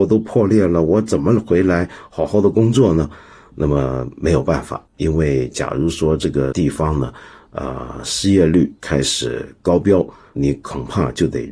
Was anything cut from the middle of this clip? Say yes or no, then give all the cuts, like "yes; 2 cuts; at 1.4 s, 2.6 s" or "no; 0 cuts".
no; 0 cuts